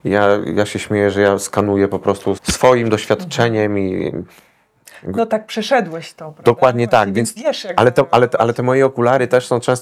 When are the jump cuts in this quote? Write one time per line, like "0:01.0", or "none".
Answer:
0:02.4
0:07.4